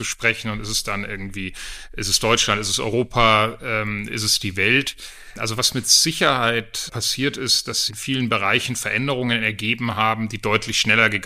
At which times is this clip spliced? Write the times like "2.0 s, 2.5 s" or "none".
7.9 s